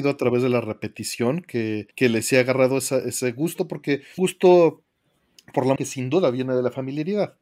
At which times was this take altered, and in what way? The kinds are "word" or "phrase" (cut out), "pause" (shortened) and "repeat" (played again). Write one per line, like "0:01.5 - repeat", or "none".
0:01.9 - pause
0:04.2 - phrase
0:05.8 - word